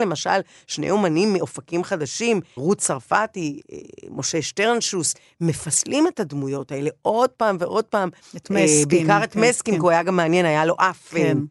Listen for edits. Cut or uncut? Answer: uncut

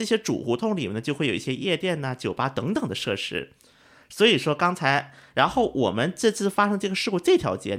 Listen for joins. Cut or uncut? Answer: uncut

